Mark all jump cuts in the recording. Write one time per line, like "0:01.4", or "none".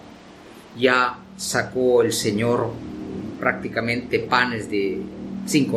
none